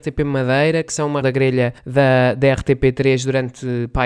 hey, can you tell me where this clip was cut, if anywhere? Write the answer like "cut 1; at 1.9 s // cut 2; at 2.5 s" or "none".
cut 1; at 1.2 s // cut 2; at 1.8 s